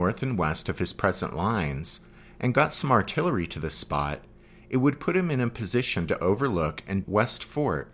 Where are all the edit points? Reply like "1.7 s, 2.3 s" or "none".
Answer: 7.0 s